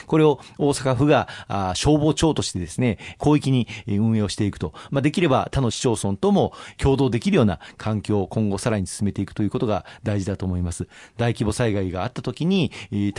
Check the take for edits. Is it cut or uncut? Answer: uncut